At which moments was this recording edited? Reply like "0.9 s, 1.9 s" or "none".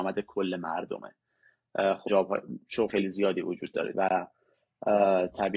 2.1 s, 2.9 s, 3.9 s